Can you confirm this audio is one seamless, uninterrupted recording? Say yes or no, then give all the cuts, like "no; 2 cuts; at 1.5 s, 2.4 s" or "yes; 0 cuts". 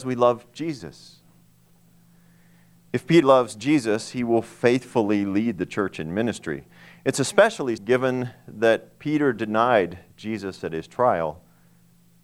no; 2 cuts; at 3.2 s, 7.8 s